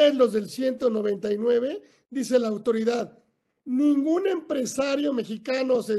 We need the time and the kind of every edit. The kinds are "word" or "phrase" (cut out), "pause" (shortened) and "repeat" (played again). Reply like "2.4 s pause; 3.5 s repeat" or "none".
none